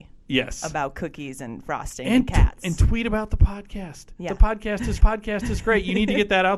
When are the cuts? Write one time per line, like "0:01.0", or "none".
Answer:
0:05.0